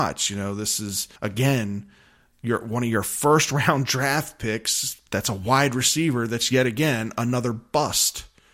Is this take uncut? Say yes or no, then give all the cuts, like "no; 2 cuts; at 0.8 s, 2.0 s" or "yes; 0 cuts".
no; 1 cut; at 1.2 s